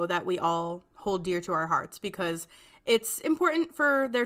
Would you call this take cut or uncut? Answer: uncut